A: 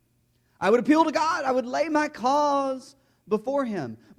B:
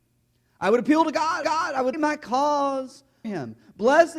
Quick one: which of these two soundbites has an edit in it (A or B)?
B